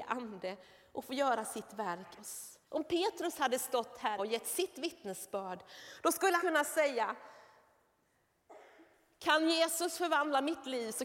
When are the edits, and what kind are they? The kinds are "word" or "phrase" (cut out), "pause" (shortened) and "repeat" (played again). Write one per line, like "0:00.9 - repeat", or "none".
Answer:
0:02.2 - word
0:02.6 - pause
0:04.2 - word
0:06.4 - word